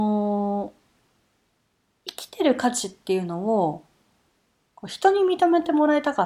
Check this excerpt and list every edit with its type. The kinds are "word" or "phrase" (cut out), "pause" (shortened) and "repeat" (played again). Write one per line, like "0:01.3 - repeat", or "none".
none